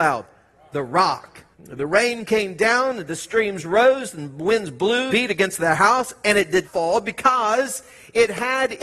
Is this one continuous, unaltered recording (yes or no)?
no